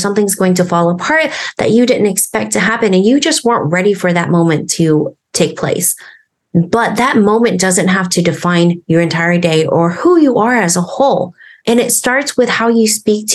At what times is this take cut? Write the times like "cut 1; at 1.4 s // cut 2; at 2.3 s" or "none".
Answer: none